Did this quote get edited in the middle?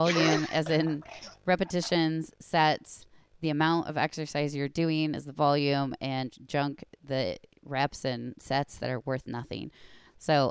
no; 0 cuts

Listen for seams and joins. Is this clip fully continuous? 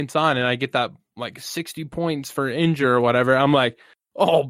yes; 0 cuts

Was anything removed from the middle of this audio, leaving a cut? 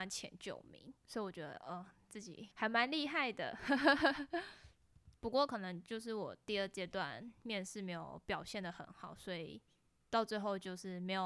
yes; 3 cuts; at 1.0 s, 2.5 s, 5.2 s

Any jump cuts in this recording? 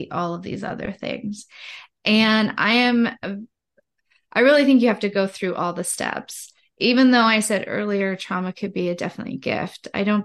no; 0 cuts

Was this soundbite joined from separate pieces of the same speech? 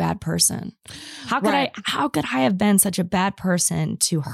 no; 0 cuts

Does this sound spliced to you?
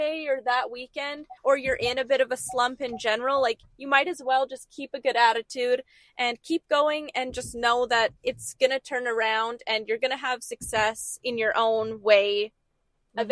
yes; 2 cuts; at 1.4 s, 8.2 s

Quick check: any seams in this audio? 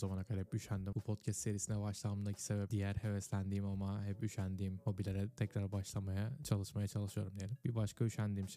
yes; 2 cuts; at 0.9 s, 2.7 s

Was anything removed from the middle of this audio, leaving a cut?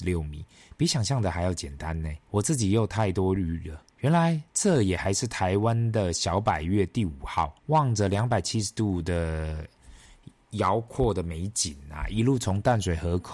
yes; 4 cuts; at 2.2 s, 3.9 s, 4.5 s, 7.6 s

